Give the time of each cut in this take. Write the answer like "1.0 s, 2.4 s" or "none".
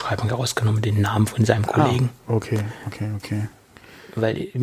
none